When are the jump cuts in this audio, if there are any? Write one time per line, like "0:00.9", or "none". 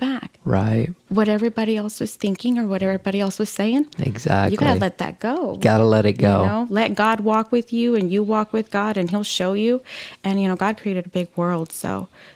0:01.0
0:09.1